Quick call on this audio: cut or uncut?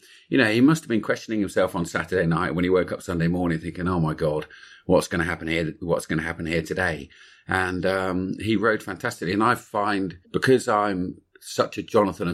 cut